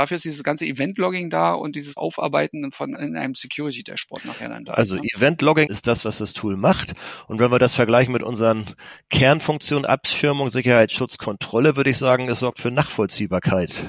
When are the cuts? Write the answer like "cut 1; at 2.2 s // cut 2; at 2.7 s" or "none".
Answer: cut 1; at 2.0 s // cut 2; at 2.9 s // cut 3; at 5.7 s